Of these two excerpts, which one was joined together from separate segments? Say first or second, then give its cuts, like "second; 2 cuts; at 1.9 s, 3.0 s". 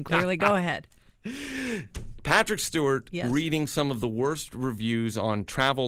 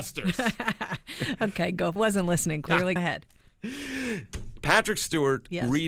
second; 2 cuts; at 2.0 s, 3.0 s